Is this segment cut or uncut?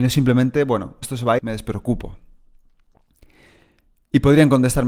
cut